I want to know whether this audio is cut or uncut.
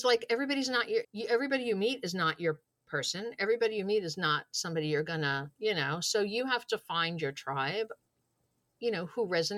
cut